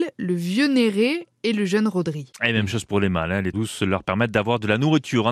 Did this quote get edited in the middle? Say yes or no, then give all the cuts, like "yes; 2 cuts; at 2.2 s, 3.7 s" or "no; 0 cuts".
yes; 1 cut; at 3.5 s